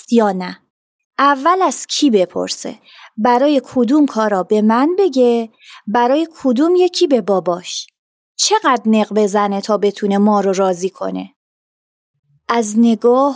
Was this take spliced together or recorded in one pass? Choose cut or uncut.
uncut